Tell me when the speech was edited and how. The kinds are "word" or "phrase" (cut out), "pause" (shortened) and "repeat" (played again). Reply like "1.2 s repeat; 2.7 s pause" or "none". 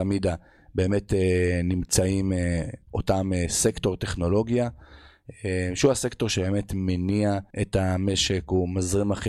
7.5 s pause